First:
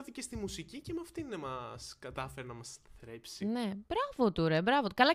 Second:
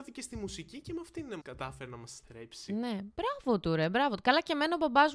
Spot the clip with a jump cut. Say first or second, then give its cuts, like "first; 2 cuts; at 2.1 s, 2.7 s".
second; 2 cuts; at 1.4 s, 2.2 s